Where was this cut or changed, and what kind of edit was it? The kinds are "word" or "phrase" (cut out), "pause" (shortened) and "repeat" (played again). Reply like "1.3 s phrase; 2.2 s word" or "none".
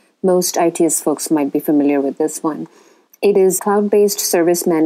3.6 s word